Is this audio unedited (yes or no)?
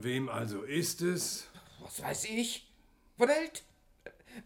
no